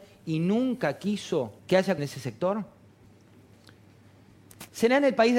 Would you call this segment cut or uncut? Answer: cut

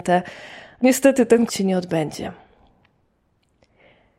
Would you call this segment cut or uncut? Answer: cut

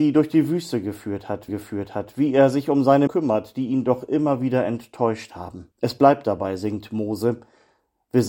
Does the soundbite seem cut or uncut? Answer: cut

